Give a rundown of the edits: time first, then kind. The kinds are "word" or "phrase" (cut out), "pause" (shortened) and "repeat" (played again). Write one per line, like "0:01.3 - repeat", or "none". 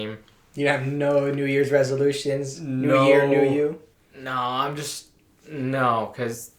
0:03.9 - pause